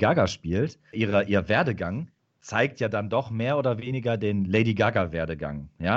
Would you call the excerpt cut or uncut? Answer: cut